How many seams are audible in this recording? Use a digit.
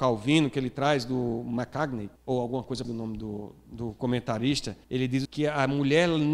5